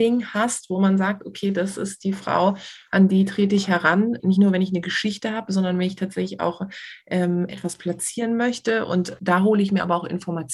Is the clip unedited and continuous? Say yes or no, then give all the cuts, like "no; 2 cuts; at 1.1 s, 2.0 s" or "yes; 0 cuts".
yes; 0 cuts